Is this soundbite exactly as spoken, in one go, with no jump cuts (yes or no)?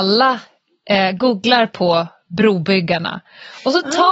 yes